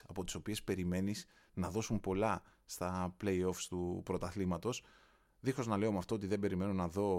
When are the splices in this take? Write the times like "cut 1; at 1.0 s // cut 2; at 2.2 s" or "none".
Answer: none

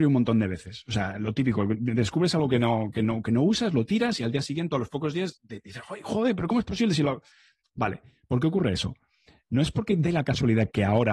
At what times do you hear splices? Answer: none

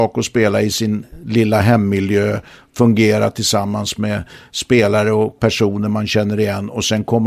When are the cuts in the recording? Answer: none

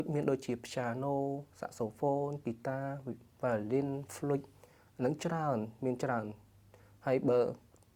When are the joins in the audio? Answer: none

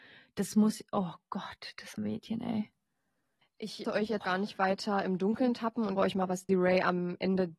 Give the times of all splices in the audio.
cut 1; at 2.0 s // cut 2; at 3.8 s // cut 3; at 4.2 s // cut 4; at 6.0 s // cut 5; at 6.5 s

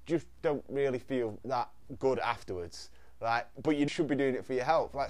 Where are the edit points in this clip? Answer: cut 1; at 1.4 s // cut 2; at 3.9 s

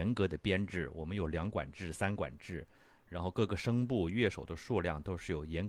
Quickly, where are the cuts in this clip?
none

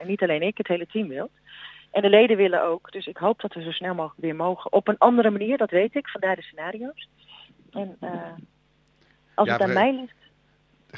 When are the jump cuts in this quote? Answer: none

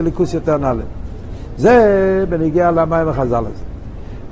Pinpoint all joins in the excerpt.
none

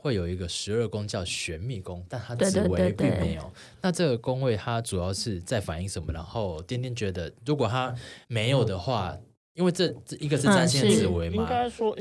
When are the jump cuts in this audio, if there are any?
cut 1; at 8.2 s

